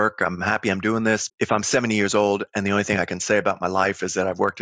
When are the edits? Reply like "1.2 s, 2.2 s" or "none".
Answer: 1.3 s